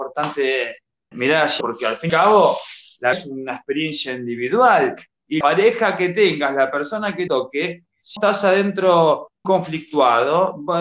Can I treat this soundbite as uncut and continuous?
no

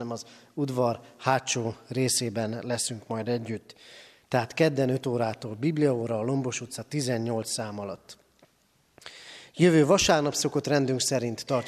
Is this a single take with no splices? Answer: yes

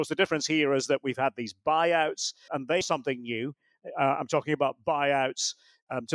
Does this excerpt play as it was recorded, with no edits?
no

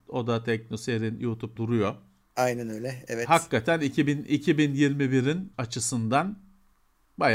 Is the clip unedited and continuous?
no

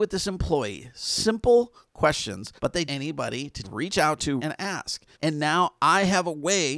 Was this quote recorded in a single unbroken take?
no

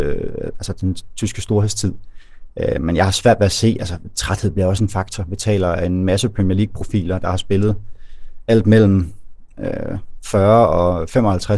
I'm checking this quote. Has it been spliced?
no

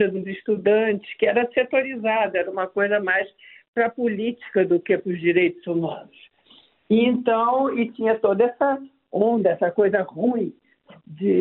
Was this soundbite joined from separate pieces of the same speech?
no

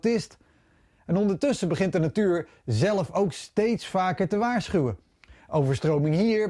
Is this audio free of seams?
yes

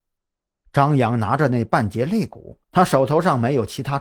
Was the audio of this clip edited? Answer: yes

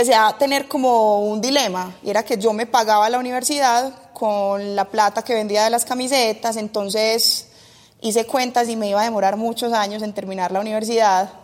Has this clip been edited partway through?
no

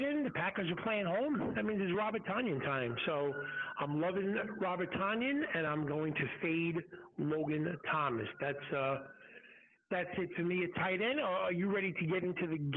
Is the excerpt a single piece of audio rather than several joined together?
yes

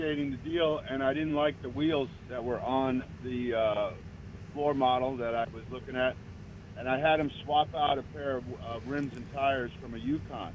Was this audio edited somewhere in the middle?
no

